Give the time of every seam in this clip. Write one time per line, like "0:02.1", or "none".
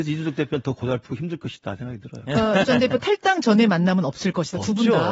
0:02.6